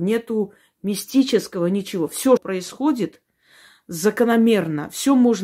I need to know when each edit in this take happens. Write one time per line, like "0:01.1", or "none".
0:02.4